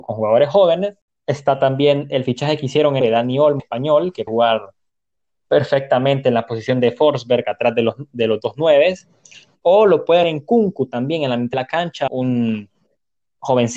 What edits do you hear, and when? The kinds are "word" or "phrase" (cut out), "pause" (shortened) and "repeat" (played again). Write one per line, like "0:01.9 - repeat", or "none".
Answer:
0:03.0 - word
0:03.6 - word
0:04.3 - word
0:10.2 - word
0:11.5 - word
0:12.1 - word